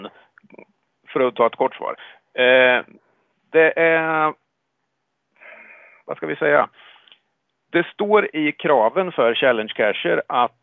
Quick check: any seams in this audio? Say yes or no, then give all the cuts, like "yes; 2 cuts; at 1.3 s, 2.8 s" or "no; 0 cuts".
no; 0 cuts